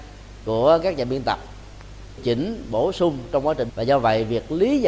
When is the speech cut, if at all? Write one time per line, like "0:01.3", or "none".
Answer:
0:02.2
0:03.7